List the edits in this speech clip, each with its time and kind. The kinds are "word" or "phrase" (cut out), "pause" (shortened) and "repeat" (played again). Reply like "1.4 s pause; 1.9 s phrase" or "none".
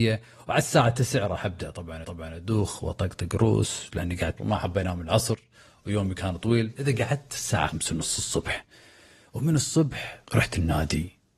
2.0 s repeat; 4.4 s word; 6.7 s word; 7.7 s word; 10.3 s pause